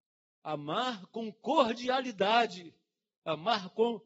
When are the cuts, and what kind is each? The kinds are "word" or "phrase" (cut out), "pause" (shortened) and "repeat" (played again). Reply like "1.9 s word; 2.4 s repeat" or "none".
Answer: none